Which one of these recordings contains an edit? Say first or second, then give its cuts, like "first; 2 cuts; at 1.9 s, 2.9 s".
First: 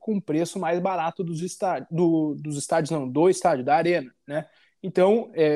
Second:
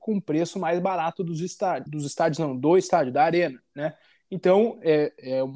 second; 1 cut; at 1.9 s